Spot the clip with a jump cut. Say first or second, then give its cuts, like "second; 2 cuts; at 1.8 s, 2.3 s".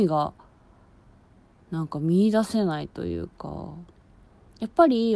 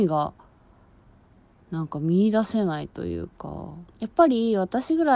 second; 1 cut; at 3.9 s